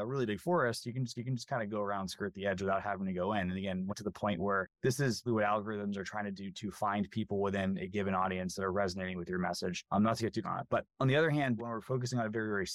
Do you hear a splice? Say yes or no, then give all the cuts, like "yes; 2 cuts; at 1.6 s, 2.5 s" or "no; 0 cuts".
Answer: yes; 5 cuts; at 1.1 s, 3.9 s, 5.3 s, 10.4 s, 11.6 s